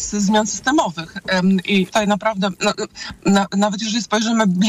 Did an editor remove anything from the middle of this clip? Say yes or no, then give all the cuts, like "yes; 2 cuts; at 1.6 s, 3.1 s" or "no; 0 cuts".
yes; 1 cut; at 1.9 s